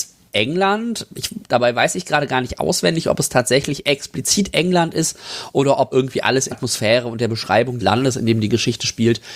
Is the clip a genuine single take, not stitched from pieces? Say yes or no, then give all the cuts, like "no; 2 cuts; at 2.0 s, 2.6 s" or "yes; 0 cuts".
no; 3 cuts; at 5.9 s, 6.5 s, 7.8 s